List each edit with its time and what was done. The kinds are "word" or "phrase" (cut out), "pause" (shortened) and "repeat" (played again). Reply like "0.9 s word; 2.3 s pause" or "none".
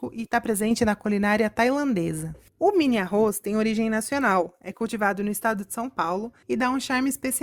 6.4 s pause